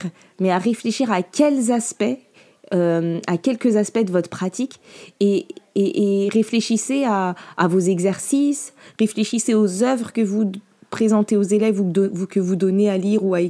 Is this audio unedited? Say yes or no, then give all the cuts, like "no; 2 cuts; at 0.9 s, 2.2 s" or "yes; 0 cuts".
yes; 0 cuts